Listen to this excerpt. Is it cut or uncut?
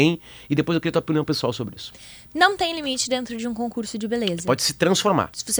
uncut